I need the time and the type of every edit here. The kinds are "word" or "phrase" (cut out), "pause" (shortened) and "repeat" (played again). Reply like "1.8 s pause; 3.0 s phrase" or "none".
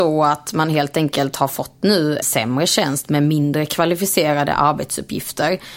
2.2 s word